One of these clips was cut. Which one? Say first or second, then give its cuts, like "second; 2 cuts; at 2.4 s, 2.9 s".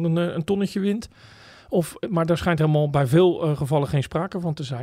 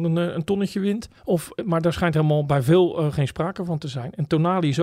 second; 2 cuts; at 1.2 s, 3.1 s